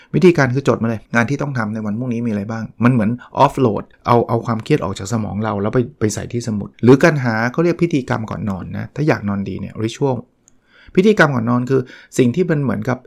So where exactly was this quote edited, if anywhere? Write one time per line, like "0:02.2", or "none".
0:01.1
0:03.9
0:06.7